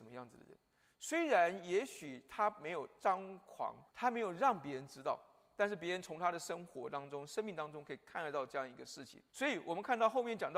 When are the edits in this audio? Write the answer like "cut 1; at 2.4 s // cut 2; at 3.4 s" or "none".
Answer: cut 1; at 3.9 s // cut 2; at 9.3 s

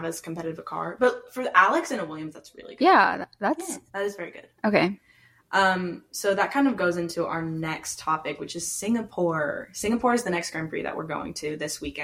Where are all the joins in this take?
cut 1; at 3.9 s // cut 2; at 4.6 s

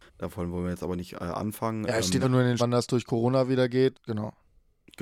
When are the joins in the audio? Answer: cut 1; at 2.2 s // cut 2; at 2.6 s // cut 3; at 3.9 s

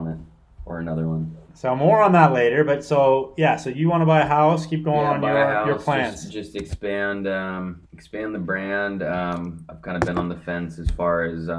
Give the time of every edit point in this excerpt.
cut 1; at 1.5 s // cut 2; at 7.8 s

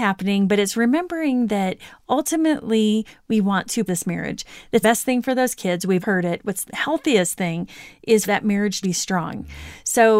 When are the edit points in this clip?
cut 1; at 3.9 s // cut 2; at 4.8 s // cut 3; at 6.0 s // cut 4; at 6.6 s // cut 5; at 8.2 s // cut 6; at 8.8 s

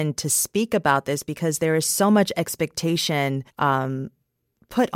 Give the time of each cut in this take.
cut 1; at 3.5 s

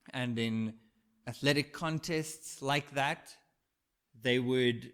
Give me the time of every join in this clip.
none

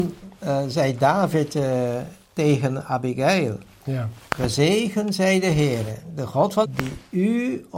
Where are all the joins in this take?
cut 1; at 2.2 s // cut 2; at 6.6 s

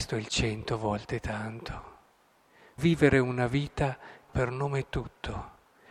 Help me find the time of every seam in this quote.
cut 1; at 2.8 s // cut 2; at 4.3 s

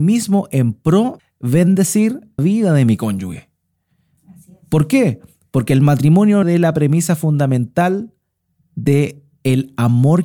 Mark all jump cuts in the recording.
cut 1; at 1.2 s // cut 2; at 2.4 s // cut 3; at 6.4 s

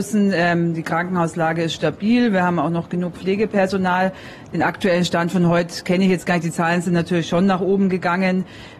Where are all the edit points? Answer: none

